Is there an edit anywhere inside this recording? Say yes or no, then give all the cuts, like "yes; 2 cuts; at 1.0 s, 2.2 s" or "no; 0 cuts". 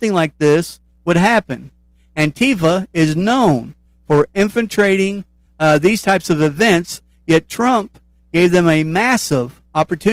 no; 0 cuts